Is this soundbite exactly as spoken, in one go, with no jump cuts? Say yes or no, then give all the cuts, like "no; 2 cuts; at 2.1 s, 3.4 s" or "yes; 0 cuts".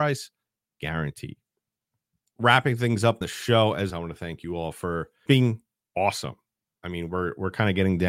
no; 4 cuts; at 2.4 s, 3.2 s, 3.9 s, 5.3 s